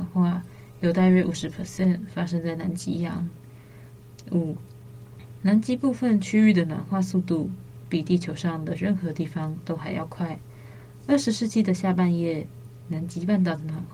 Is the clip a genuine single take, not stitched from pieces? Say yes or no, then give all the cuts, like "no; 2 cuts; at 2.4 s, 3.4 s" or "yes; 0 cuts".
yes; 0 cuts